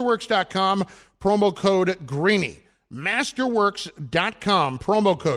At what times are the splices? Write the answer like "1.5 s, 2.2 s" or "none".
none